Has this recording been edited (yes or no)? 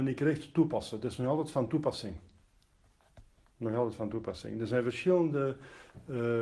no